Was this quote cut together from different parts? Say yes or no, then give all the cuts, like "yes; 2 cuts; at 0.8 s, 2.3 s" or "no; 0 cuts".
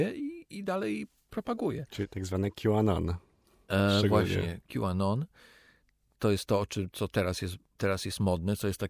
no; 0 cuts